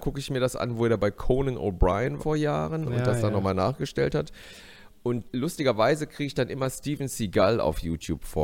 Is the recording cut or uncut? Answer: cut